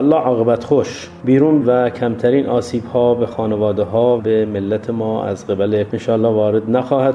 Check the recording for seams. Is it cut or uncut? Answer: cut